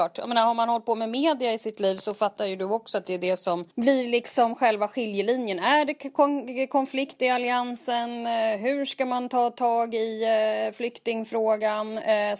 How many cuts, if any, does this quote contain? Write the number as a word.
one